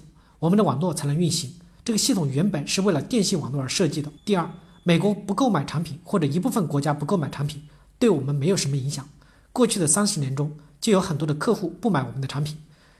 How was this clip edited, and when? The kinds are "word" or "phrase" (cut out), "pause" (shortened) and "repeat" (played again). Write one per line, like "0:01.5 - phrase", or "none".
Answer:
0:04.2 - pause

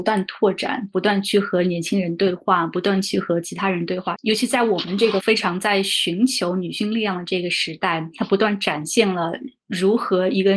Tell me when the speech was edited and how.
0:04.1 - phrase

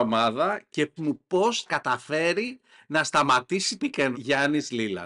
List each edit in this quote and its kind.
0:01.0 - word
0:01.7 - word
0:03.8 - word
0:04.1 - word

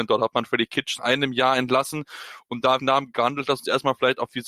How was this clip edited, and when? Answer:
0:01.0 - word
0:02.8 - phrase

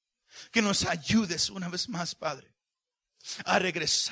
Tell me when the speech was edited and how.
none

